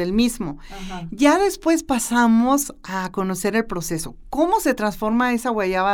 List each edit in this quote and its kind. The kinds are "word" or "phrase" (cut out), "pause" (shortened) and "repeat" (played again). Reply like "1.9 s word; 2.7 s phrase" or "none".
none